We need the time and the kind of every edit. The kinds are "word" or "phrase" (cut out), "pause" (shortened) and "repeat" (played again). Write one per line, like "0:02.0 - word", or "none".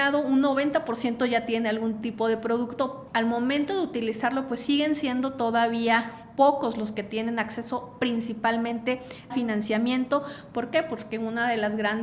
0:03.1 - word
0:09.3 - word